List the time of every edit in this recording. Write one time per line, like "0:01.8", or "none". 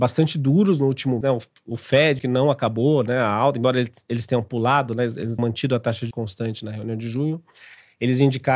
0:01.2
0:02.2
0:05.4
0:06.1